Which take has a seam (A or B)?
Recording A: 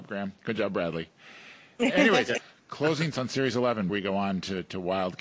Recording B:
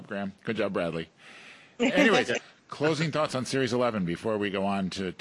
A